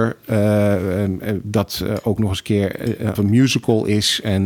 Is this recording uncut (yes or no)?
no